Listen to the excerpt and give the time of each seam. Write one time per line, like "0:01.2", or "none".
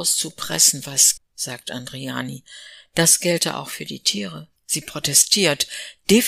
0:01.2
0:04.6